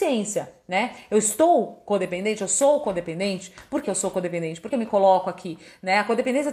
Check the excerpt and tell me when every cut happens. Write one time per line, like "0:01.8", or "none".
0:03.8
0:04.7